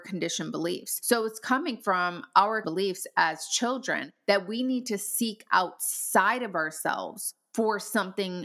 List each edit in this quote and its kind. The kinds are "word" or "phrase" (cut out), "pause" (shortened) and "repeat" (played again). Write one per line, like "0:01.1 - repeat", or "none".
0:02.6 - word

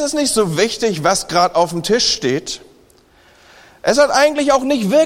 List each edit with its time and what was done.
none

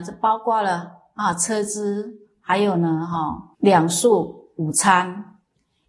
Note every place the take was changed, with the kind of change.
0:03.5 - pause

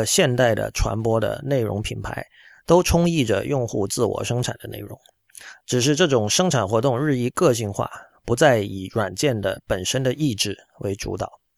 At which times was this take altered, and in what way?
none

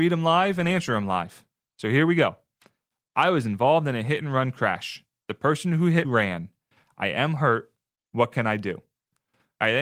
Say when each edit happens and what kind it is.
0:06.0 - word

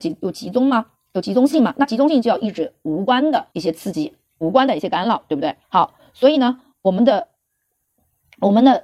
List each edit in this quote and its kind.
0:03.5 - pause
0:05.6 - pause

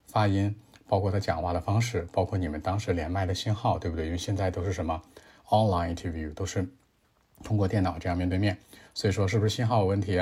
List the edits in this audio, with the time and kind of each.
none

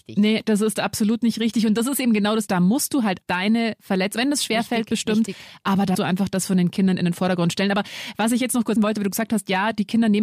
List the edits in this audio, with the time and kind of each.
0:02.5 - word
0:03.2 - word
0:04.2 - word
0:05.9 - word
0:08.8 - word

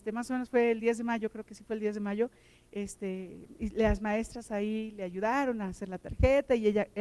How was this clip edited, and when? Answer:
none

